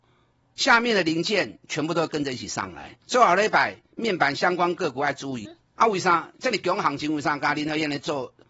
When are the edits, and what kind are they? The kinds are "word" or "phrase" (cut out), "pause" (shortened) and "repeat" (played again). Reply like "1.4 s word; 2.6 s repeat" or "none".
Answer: 3.0 s pause; 5.5 s phrase

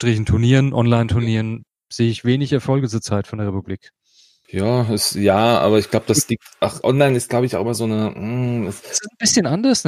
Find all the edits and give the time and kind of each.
none

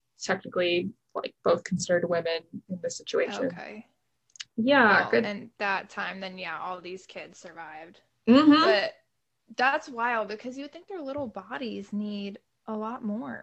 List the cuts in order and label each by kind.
none

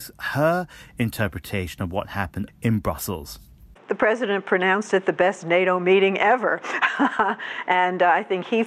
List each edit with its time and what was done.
2.5 s word

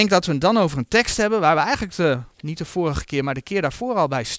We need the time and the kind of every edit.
2.3 s pause

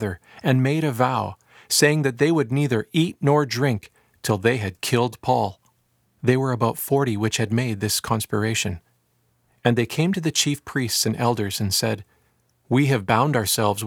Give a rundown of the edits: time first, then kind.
none

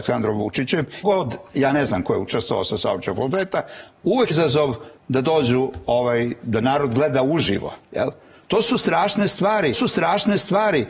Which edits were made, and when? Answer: 1.0 s phrase; 4.3 s word; 5.0 s pause; 9.7 s repeat

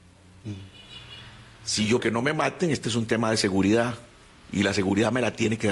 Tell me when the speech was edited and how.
2.0 s word

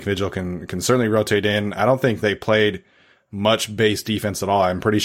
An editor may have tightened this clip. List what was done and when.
none

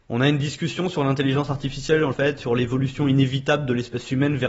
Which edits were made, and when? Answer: 2.1 s phrase

